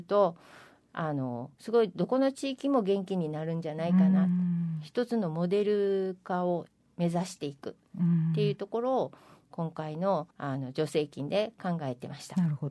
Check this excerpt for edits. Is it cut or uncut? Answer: cut